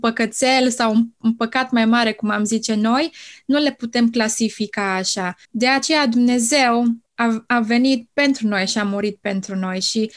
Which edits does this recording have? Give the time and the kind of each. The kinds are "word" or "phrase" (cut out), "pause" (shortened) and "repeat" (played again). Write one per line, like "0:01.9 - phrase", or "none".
0:05.4 - pause
0:07.0 - pause